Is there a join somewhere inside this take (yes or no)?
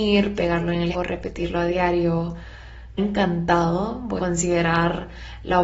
yes